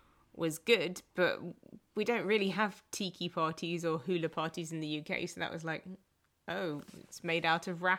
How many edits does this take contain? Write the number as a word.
zero